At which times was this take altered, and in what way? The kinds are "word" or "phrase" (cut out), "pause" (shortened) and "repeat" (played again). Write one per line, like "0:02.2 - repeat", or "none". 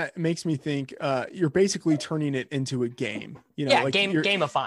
none